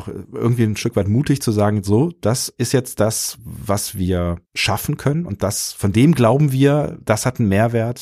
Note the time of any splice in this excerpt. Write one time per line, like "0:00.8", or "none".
0:04.4